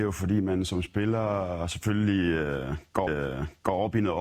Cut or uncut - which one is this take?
cut